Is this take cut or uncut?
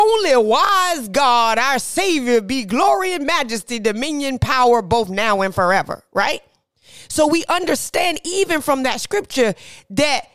uncut